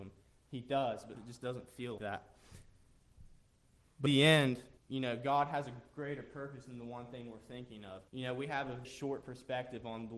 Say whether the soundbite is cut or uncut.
cut